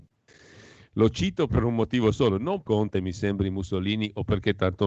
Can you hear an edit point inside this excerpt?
yes; 2 cuts; at 1.5 s, 2.6 s

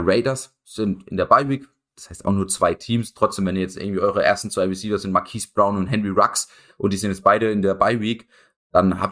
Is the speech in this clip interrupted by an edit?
no; 0 cuts

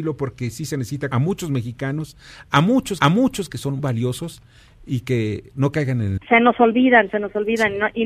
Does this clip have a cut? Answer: yes; 4 cuts; at 1.1 s, 3.0 s, 3.8 s, 6.2 s

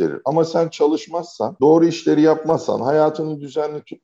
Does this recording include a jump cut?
no; 0 cuts

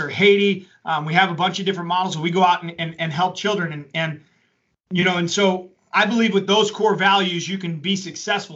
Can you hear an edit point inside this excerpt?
no; 0 cuts

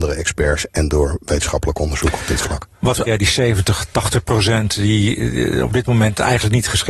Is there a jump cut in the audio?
yes; 1 cut; at 3.1 s

